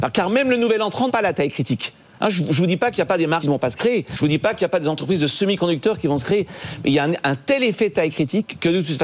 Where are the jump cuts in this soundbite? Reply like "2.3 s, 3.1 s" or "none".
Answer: 1.1 s, 3.4 s, 4.1 s